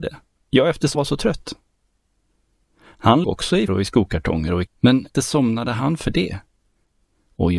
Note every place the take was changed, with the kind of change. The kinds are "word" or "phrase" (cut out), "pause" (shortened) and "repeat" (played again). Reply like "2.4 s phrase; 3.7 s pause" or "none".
0.9 s word; 3.2 s word; 3.7 s word; 4.7 s word; 5.1 s word